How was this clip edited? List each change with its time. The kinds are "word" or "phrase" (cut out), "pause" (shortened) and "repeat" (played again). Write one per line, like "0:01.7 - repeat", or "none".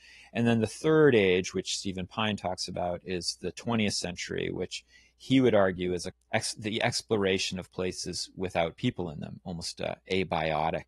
none